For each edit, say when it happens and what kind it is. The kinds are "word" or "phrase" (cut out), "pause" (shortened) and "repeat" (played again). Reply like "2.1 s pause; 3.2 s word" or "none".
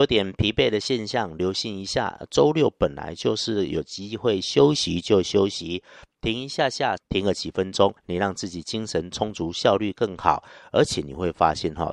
8.0 s pause